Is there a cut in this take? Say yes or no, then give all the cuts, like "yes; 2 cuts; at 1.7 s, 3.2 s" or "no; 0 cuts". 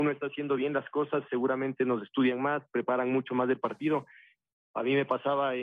no; 0 cuts